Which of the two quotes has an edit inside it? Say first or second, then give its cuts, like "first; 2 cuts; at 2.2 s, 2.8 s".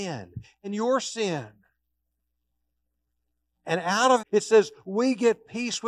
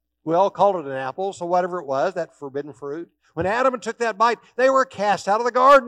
first; 1 cut; at 4.2 s